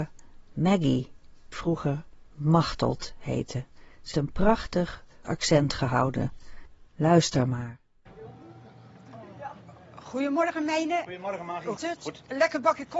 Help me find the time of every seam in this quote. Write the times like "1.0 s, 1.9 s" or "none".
1.5 s, 4.1 s, 5.2 s, 11.8 s